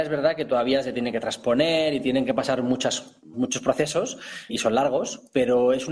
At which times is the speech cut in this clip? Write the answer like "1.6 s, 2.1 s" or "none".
3.3 s, 4.5 s